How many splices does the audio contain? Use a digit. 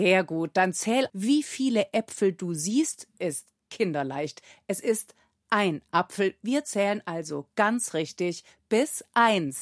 1